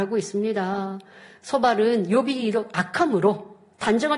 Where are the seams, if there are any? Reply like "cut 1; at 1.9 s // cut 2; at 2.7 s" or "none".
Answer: none